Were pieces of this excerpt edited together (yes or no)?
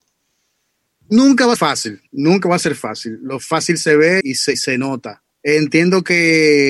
yes